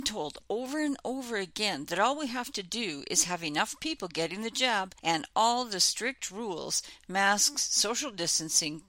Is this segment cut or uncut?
uncut